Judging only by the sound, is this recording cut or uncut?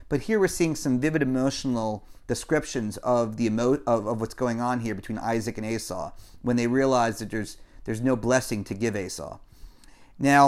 uncut